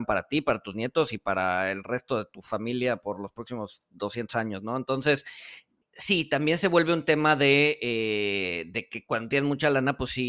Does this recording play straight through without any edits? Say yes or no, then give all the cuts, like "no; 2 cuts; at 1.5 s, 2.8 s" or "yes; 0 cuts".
yes; 0 cuts